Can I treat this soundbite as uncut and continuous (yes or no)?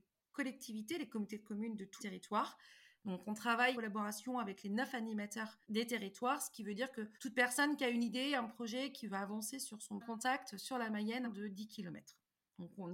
no